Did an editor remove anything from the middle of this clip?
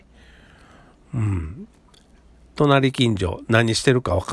no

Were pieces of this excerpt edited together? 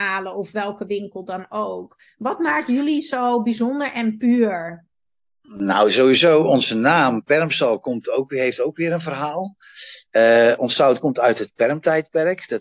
no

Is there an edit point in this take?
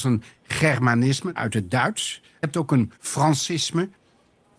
yes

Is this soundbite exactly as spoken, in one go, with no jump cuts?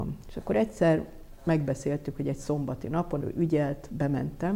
no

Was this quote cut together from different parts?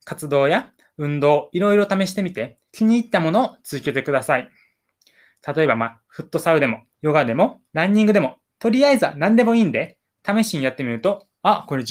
yes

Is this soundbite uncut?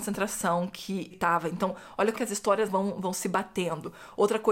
no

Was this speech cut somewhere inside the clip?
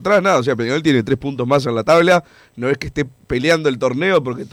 no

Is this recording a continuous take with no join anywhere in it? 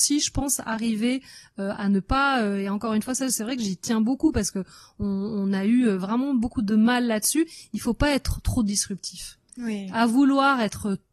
yes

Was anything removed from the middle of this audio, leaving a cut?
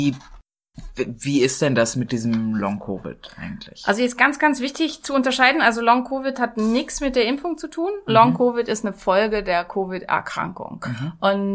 no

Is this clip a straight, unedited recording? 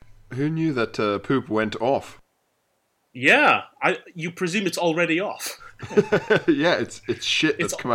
yes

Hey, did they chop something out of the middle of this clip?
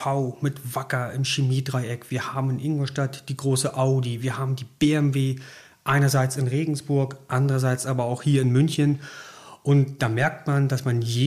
no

